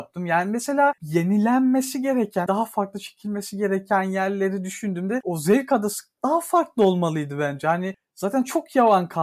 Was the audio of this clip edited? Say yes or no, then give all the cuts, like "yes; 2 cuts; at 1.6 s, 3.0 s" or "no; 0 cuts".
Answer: yes; 2 cuts; at 2.5 s, 6.2 s